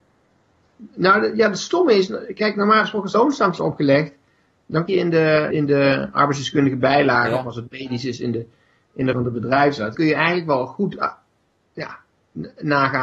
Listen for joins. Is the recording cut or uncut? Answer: cut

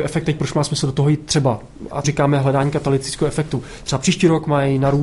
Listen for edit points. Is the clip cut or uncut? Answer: cut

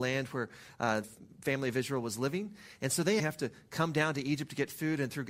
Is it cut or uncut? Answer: cut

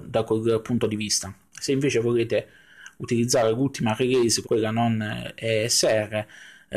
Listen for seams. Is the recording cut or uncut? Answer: cut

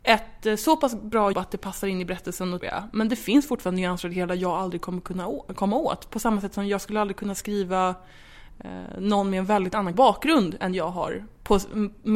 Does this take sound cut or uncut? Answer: cut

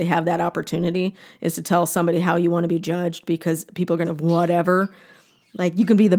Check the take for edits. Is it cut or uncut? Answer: cut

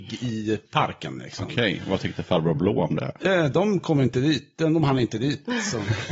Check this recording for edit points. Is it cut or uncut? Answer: uncut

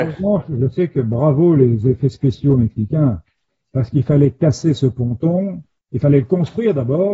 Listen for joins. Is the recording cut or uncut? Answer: uncut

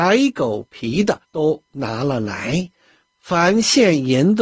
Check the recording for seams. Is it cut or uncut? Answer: cut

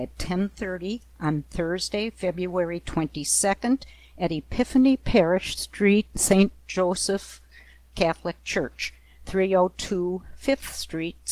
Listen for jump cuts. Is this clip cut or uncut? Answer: uncut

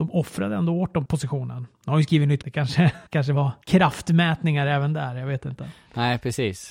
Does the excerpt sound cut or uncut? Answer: cut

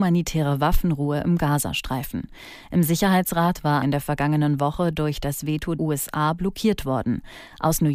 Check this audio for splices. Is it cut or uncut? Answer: cut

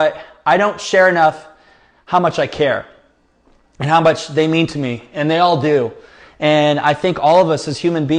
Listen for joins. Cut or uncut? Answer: uncut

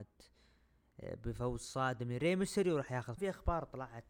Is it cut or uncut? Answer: cut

